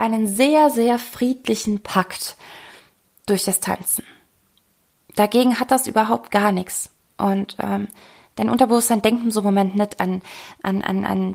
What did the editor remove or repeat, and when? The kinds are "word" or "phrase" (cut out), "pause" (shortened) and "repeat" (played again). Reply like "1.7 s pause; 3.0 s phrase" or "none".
none